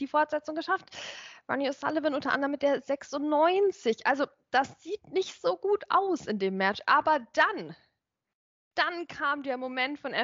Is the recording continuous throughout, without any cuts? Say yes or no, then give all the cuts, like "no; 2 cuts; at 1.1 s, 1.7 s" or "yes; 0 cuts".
yes; 0 cuts